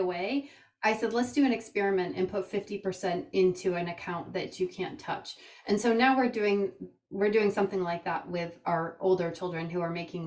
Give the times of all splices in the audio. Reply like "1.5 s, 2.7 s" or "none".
none